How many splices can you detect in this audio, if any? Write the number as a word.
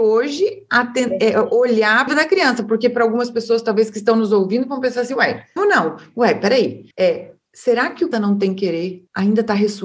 four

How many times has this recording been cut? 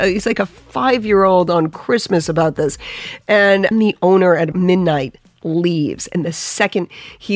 two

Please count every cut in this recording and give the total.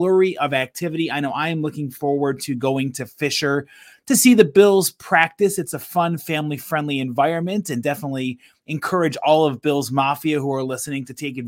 zero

